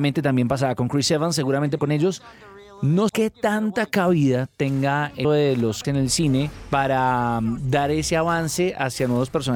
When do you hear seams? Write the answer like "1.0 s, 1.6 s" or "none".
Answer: 1.8 s, 3.1 s, 5.2 s, 5.8 s